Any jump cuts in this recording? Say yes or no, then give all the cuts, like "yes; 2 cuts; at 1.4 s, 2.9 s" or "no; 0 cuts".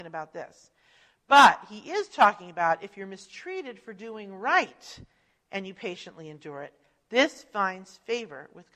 no; 0 cuts